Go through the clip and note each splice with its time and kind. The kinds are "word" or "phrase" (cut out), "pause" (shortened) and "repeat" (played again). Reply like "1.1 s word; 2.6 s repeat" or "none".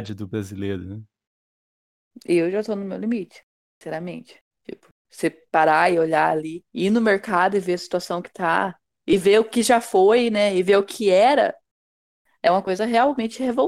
6.7 s pause